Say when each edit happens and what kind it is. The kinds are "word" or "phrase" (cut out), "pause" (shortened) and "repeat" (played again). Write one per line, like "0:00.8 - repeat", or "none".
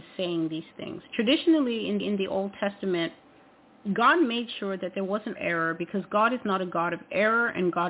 0:02.0 - repeat
0:05.3 - phrase